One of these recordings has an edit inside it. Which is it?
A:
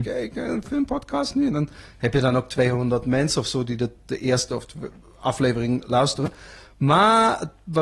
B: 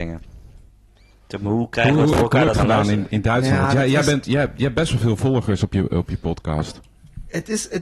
B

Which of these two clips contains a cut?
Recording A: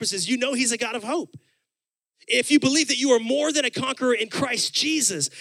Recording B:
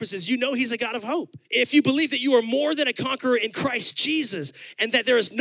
B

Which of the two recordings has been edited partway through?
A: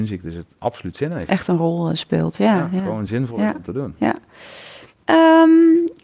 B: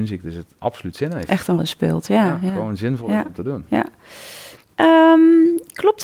B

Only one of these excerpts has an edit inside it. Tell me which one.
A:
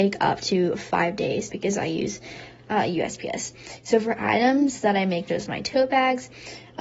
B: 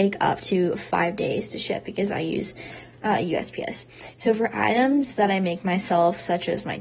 A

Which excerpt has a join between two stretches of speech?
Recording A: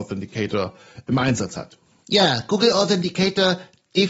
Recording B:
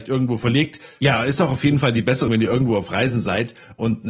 B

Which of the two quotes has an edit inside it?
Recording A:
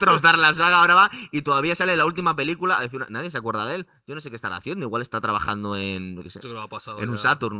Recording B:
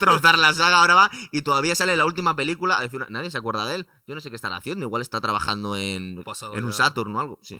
B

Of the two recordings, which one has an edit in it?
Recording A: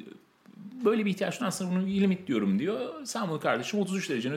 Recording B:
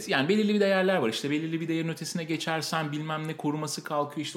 A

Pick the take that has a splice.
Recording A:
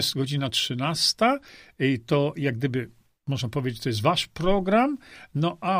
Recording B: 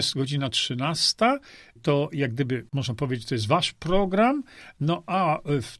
B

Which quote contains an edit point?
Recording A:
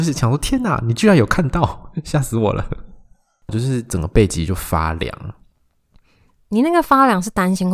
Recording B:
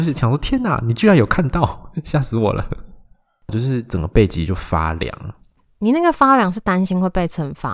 B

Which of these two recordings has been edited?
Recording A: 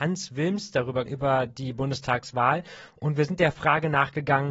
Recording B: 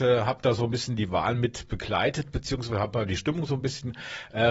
A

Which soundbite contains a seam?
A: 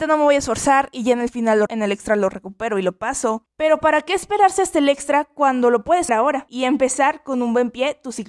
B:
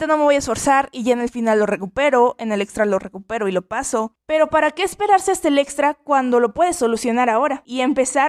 A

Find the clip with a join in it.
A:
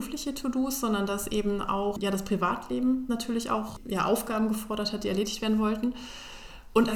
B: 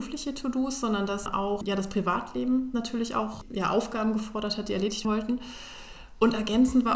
B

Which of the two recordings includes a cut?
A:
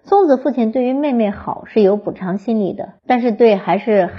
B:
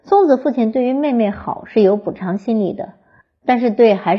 A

